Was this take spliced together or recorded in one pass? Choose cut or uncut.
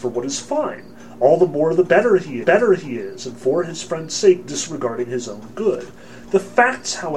cut